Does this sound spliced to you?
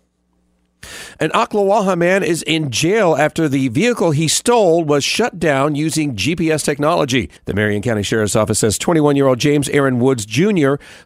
yes; 1 cut; at 7.4 s

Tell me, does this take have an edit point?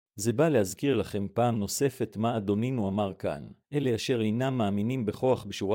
yes; 1 cut; at 3.6 s

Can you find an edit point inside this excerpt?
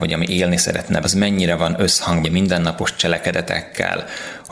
yes; 2 cuts; at 1.0 s, 2.2 s

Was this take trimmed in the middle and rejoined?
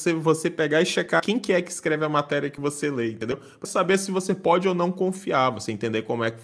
yes; 1 cut; at 3.6 s

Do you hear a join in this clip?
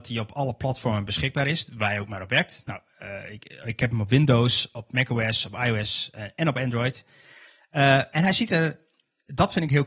no; 0 cuts

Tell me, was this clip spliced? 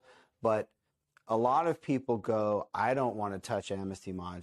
no; 0 cuts

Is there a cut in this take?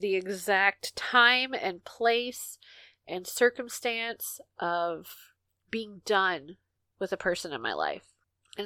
no; 0 cuts

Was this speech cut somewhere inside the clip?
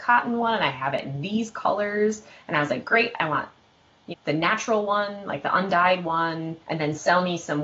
yes; 2 cuts; at 4.1 s, 6.6 s

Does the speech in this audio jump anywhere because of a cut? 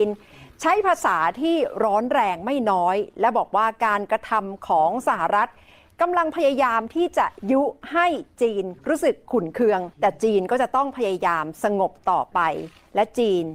yes; 2 cuts; at 8.8 s, 9.9 s

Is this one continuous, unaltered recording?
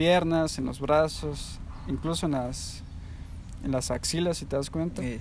yes; 0 cuts

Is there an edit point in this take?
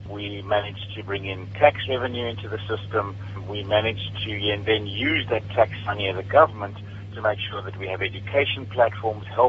no; 0 cuts

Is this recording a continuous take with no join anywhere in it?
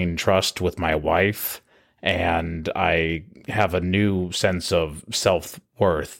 yes; 0 cuts

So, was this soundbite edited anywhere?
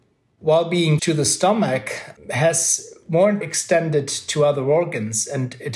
yes; 2 cuts; at 1.0 s, 3.4 s

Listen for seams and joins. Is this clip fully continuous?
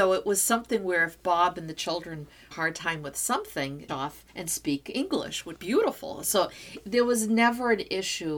no; 4 cuts; at 2.5 s, 3.9 s, 4.3 s, 5.6 s

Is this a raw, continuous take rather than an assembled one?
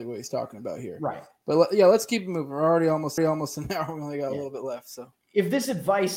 no; 1 cut; at 3.2 s

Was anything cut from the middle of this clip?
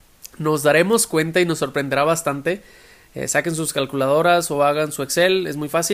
no; 0 cuts

